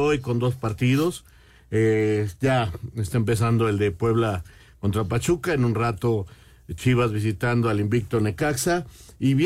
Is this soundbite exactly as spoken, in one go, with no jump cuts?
yes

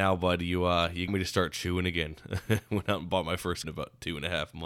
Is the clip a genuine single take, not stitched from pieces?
no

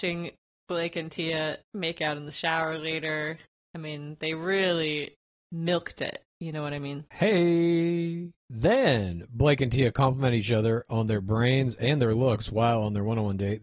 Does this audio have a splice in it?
yes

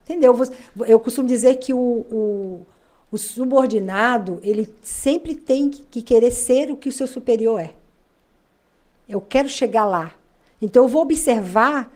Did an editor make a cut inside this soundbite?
no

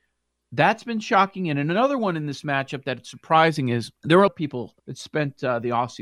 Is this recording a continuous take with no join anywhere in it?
no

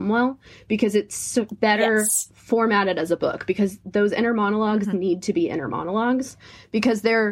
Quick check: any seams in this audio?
no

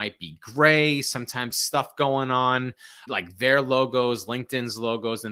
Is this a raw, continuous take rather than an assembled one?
no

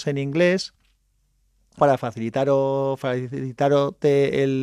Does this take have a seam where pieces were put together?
yes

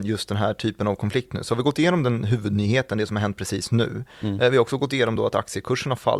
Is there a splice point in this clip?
no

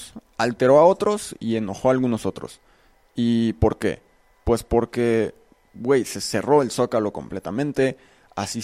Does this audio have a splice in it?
no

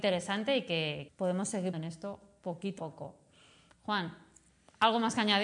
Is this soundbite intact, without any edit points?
no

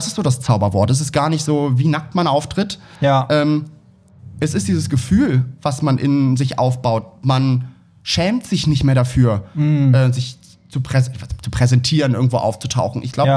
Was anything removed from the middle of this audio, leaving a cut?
no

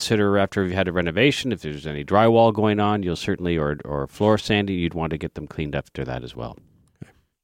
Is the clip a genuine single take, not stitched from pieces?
yes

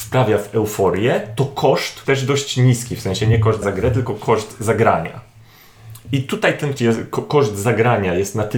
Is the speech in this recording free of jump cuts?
no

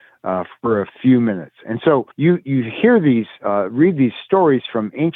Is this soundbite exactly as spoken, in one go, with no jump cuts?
no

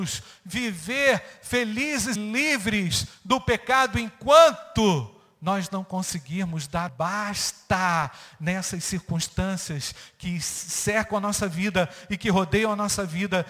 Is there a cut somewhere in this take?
yes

